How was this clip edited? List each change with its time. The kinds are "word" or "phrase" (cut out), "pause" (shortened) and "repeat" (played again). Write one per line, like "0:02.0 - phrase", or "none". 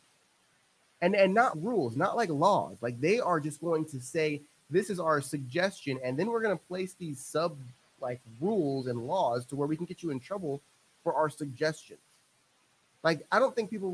0:01.5 - word